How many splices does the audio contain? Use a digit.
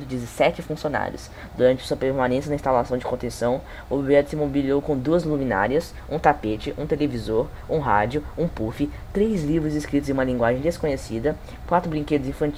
0